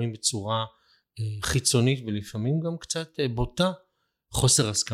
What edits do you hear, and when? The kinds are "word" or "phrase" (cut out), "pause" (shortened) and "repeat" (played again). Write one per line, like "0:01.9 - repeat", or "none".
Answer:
none